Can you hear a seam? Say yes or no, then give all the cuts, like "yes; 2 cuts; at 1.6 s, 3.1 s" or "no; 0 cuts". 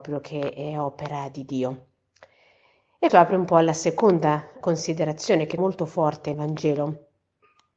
yes; 4 cuts; at 3.1 s, 4.6 s, 5.6 s, 6.3 s